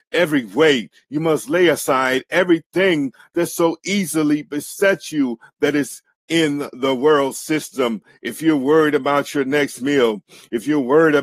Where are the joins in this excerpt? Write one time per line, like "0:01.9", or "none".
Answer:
none